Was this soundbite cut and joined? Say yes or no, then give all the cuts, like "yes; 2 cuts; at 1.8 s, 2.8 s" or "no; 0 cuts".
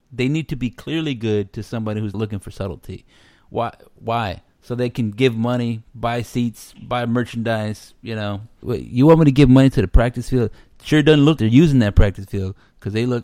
yes; 3 cuts; at 2.1 s, 8.6 s, 11.4 s